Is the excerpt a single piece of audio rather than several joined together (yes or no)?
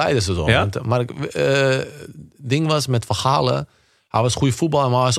yes